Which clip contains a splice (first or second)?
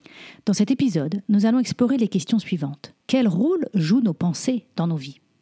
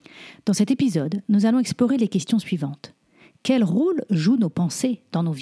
first